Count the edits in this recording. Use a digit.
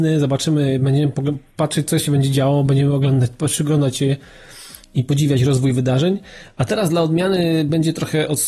0